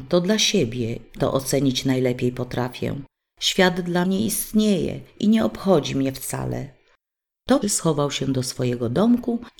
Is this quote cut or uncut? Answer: cut